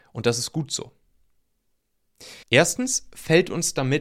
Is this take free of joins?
no; 1 cut; at 2.4 s

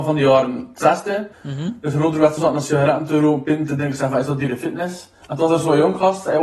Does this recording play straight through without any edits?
no; 3 cuts; at 1.3 s, 2.4 s, 5.2 s

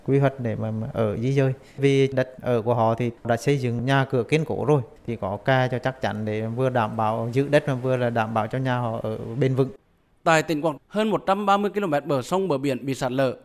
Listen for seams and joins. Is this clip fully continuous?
no; 1 cut; at 10.8 s

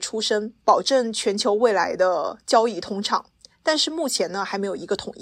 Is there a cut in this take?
no; 0 cuts

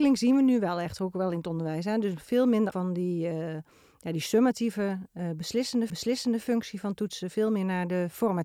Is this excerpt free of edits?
no; 2 cuts; at 2.7 s, 5.9 s

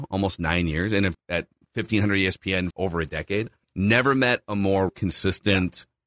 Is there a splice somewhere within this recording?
yes; 4 cuts; at 1.1 s, 2.7 s, 3.6 s, 4.9 s

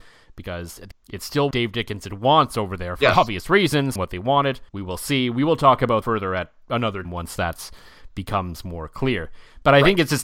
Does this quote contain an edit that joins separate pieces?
yes; 6 cuts; at 0.9 s, 1.5 s, 4.0 s, 4.7 s, 6.0 s, 7.0 s

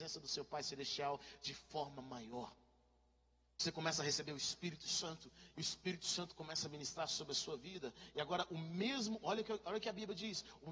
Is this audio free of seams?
yes; 0 cuts

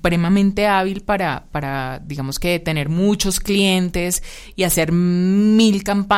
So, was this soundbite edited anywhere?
no; 0 cuts

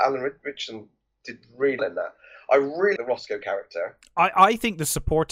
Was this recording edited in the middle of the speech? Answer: yes; 2 cuts; at 1.8 s, 3.0 s

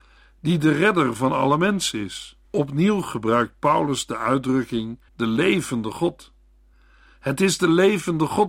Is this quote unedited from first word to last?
no; 2 cuts; at 2.5 s, 5.1 s

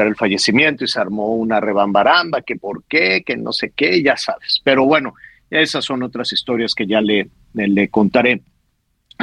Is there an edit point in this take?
no; 0 cuts

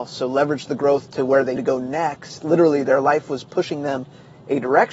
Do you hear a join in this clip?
yes; 1 cut; at 1.6 s

